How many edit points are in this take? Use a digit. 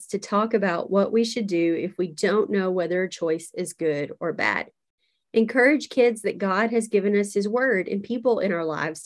0